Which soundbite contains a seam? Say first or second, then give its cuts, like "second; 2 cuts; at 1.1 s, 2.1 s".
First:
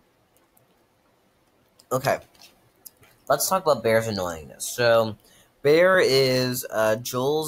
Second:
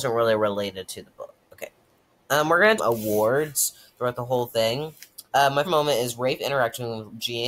second; 4 cuts; at 1.4 s, 2.8 s, 5.3 s, 5.6 s